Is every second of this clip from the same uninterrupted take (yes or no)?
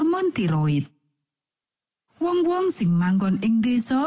yes